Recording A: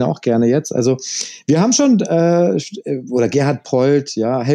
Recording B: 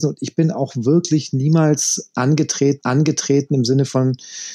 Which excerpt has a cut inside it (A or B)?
B